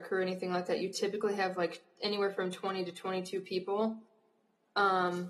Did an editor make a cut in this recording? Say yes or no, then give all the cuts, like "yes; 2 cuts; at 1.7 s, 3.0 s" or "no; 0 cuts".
no; 0 cuts